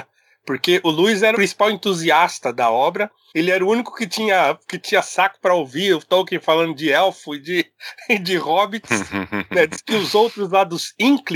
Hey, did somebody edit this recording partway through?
yes; 1 cut; at 1.3 s

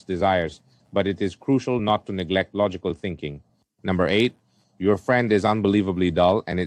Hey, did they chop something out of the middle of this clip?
no; 0 cuts

